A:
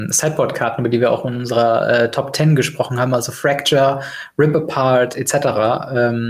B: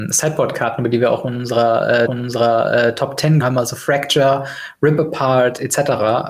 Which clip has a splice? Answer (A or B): B